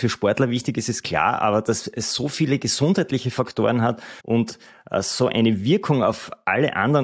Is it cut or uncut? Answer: cut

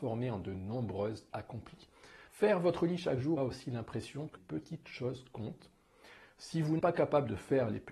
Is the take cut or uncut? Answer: cut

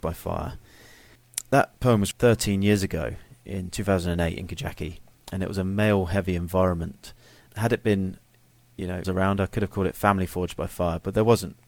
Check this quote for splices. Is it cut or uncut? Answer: cut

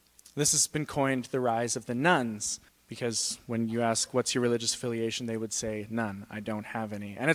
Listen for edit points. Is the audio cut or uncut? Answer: cut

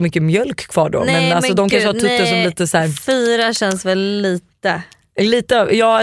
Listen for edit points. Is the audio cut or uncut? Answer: uncut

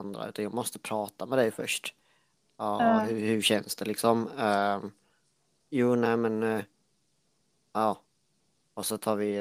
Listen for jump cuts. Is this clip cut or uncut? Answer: uncut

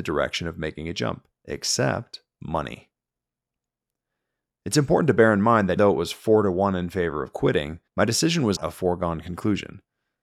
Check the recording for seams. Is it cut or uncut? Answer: cut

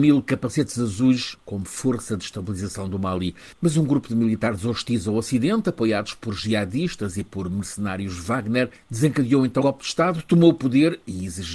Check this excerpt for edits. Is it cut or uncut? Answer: cut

